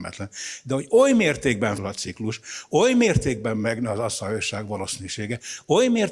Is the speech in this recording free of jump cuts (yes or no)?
no